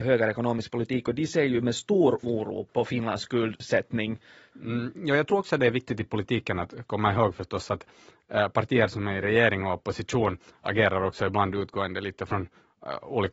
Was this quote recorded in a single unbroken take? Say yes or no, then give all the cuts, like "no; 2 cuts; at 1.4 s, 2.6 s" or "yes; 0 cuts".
yes; 0 cuts